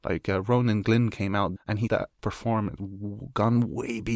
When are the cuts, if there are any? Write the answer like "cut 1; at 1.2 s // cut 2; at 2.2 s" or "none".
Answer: cut 1; at 1.6 s // cut 2; at 1.9 s // cut 3; at 2.2 s // cut 4; at 2.8 s